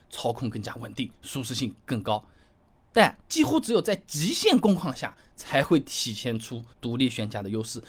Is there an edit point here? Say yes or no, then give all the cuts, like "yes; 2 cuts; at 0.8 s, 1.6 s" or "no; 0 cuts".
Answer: yes; 2 cuts; at 3.2 s, 6.7 s